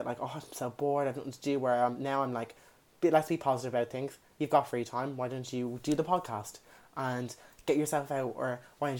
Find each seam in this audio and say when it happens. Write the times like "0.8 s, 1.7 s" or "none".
none

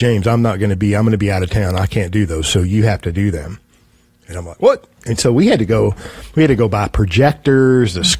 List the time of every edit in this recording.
none

